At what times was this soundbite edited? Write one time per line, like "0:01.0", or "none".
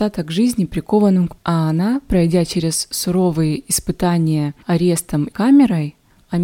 0:01.4
0:04.6
0:05.3